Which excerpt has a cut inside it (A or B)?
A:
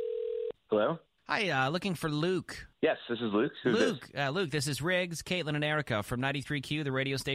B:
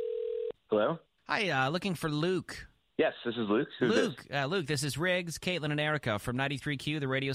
A